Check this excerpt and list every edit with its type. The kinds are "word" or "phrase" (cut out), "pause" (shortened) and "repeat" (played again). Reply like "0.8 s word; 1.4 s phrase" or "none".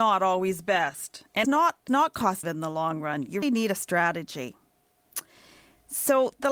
1.4 s word; 1.9 s word; 2.4 s word; 3.4 s word